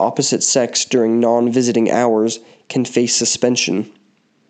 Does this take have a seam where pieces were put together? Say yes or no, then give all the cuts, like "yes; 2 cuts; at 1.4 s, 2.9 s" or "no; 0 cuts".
no; 0 cuts